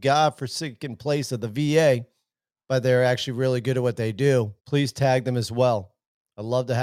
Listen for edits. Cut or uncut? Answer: cut